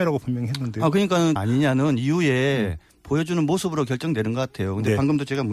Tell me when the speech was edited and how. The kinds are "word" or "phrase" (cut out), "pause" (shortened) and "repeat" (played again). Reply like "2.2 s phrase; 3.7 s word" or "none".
1.4 s phrase